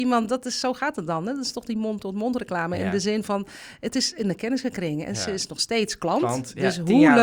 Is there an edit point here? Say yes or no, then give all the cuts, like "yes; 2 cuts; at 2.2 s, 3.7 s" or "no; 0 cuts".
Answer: no; 0 cuts